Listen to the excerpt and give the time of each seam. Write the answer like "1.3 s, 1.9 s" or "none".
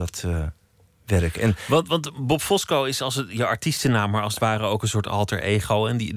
none